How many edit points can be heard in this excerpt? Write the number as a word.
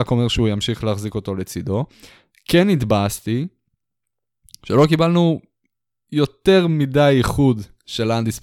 zero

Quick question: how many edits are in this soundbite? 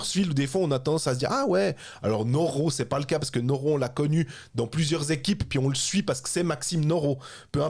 zero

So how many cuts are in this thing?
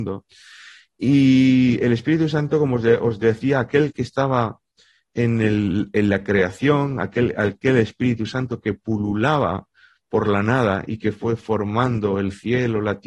zero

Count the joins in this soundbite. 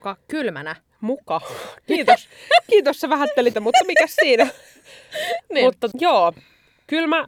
two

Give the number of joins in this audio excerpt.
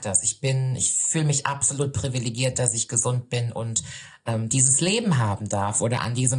zero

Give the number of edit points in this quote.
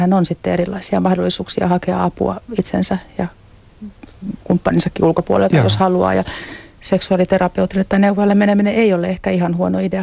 zero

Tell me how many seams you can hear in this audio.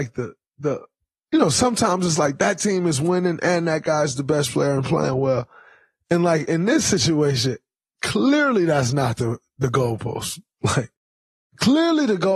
zero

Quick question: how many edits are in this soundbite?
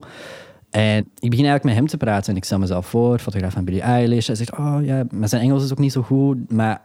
one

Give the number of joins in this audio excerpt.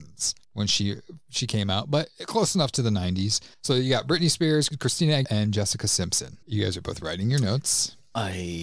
three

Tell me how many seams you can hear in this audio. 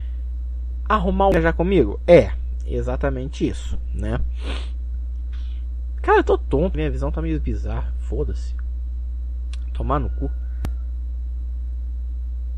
one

